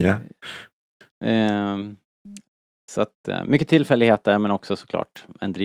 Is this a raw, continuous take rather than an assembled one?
yes; 0 cuts

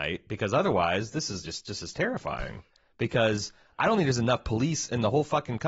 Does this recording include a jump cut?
no; 0 cuts

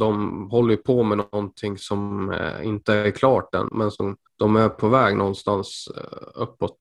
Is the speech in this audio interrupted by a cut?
yes; 2 cuts; at 3.7 s, 4.3 s

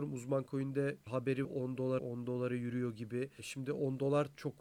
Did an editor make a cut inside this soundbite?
yes; 2 cuts; at 1.4 s, 2.0 s

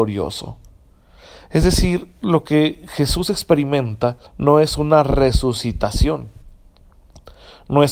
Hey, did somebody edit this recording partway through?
yes; 1 cut; at 4.3 s

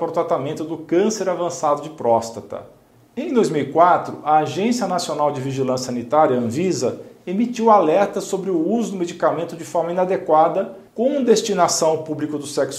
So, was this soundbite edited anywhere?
yes; 1 cut; at 10.9 s

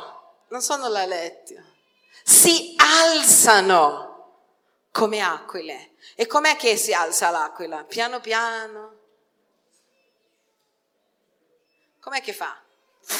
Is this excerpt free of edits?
yes; 0 cuts

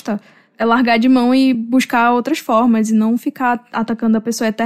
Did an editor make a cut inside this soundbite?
no; 0 cuts

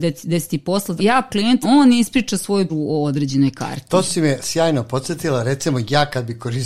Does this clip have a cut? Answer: yes; 5 cuts; at 1.0 s, 1.3 s, 1.6 s, 2.7 s, 4.4 s

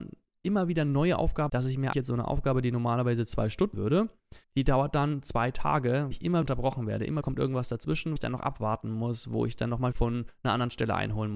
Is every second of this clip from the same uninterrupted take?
no; 9 cuts; at 1.5 s, 1.9 s, 3.7 s, 4.4 s, 6.1 s, 6.4 s, 7.2 s, 8.2 s, 9.9 s

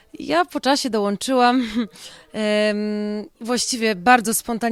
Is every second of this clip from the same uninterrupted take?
no; 1 cut; at 3.3 s

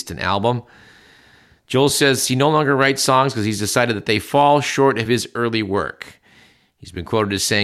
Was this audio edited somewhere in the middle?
no; 0 cuts

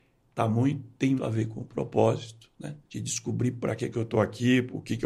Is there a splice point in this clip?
yes; 2 cuts; at 1.2 s, 2.8 s

